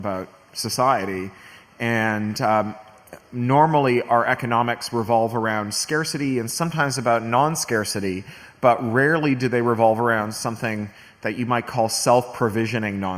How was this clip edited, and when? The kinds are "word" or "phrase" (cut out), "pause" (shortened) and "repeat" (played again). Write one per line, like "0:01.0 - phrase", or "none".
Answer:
none